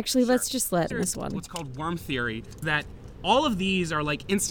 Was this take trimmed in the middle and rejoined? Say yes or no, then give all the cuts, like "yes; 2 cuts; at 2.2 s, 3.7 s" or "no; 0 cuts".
yes; 2 cuts; at 0.9 s, 2.6 s